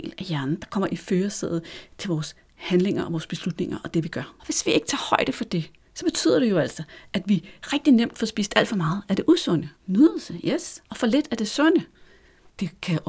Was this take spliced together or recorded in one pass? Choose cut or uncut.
cut